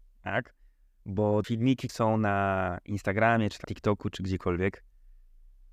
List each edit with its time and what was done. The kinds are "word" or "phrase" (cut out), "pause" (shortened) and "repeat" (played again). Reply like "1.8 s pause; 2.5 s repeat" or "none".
1.4 s word; 1.9 s word; 3.6 s word